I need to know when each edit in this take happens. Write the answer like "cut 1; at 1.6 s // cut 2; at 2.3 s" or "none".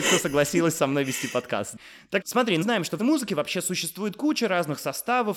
cut 1; at 2.2 s // cut 2; at 2.6 s // cut 3; at 3.0 s

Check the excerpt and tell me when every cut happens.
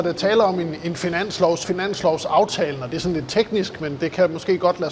cut 1; at 1.6 s

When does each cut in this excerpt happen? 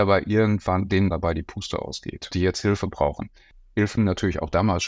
cut 1; at 1.1 s // cut 2; at 2.3 s // cut 3; at 4.0 s

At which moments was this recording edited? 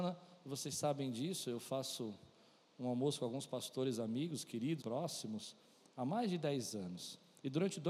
cut 1; at 4.8 s

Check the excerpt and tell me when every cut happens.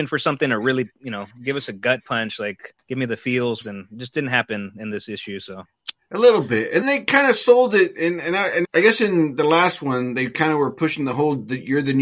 cut 1; at 2.8 s // cut 2; at 3.6 s // cut 3; at 6.8 s // cut 4; at 8.6 s

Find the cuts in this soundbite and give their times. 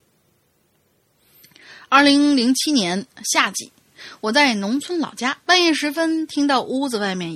cut 1; at 5.4 s

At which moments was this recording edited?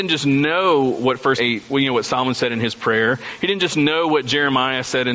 cut 1; at 1.4 s

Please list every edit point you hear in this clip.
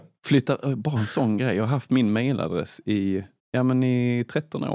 cut 1; at 3.4 s

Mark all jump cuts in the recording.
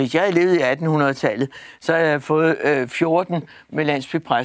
none

